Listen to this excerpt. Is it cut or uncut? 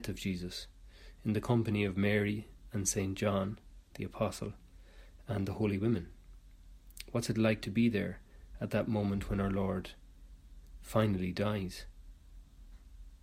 uncut